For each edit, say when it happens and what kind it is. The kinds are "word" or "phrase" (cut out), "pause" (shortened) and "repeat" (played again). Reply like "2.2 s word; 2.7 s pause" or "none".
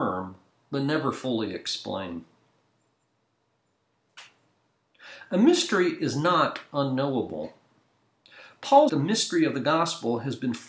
8.9 s phrase